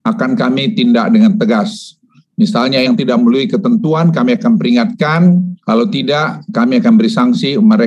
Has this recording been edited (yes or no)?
yes